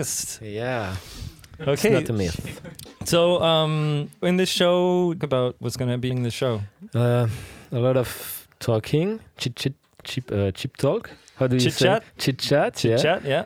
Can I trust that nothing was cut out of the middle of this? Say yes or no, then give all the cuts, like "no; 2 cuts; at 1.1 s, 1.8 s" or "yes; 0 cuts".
no; 5 cuts; at 4.2 s, 5.2 s, 6.1 s, 9.5 s, 10.0 s